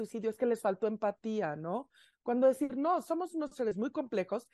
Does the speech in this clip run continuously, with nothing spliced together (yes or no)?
yes